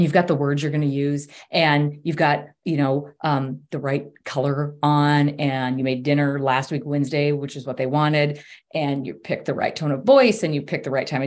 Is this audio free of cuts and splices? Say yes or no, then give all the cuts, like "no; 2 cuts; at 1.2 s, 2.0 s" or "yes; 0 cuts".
yes; 0 cuts